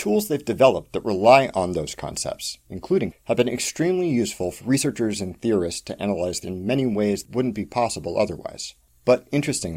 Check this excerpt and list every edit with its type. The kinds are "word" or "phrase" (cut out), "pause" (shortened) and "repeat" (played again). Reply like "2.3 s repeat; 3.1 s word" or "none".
3.1 s word; 4.6 s phrase; 6.4 s word; 7.2 s word